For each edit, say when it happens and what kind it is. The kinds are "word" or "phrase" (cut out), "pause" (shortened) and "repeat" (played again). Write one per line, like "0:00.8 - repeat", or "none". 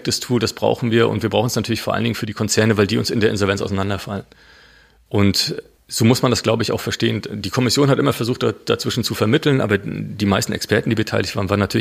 0:05.8 - pause